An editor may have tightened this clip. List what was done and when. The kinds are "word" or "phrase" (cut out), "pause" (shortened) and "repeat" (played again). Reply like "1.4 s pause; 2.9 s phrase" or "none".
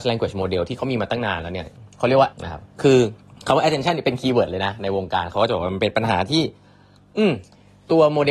2.3 s word; 2.7 s pause; 3.3 s pause